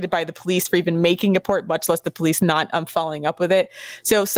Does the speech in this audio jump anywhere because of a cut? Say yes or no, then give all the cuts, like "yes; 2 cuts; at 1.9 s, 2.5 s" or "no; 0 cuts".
no; 0 cuts